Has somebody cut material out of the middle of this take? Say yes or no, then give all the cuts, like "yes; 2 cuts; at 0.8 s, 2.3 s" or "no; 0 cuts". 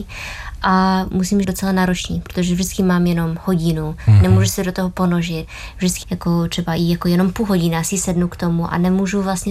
yes; 2 cuts; at 1.4 s, 6.0 s